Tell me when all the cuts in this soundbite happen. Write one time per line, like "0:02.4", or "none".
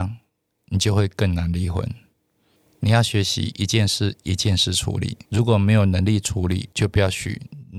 0:02.6
0:05.3
0:06.7